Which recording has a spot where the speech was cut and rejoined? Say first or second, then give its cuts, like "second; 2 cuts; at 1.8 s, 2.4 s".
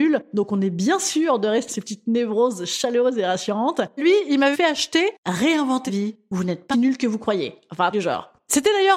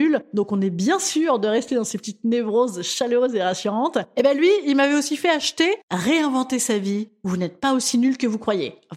first; 6 cuts; at 1.7 s, 4.0 s, 4.5 s, 5.9 s, 6.7 s, 7.9 s